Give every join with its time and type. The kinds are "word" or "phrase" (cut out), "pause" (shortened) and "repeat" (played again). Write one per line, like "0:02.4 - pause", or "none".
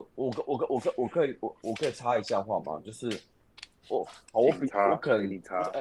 0:03.8 - word